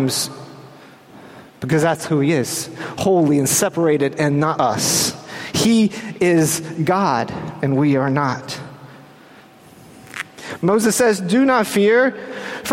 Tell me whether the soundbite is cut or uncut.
cut